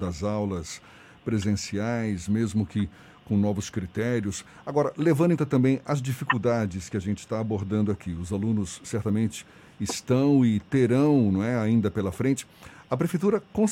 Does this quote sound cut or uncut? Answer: cut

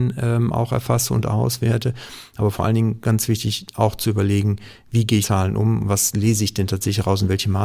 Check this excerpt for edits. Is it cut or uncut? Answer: cut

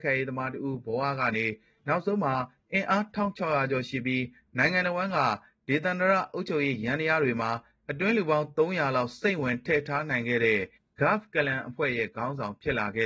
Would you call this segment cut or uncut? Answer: uncut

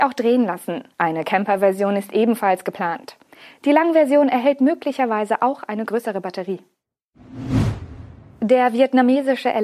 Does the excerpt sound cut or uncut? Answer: cut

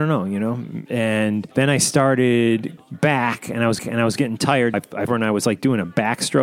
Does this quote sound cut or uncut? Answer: cut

